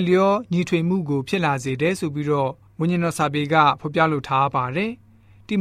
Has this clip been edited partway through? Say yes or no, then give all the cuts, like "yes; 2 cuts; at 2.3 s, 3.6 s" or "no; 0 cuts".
no; 0 cuts